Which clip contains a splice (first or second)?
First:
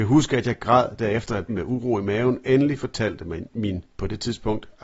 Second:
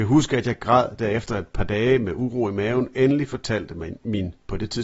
first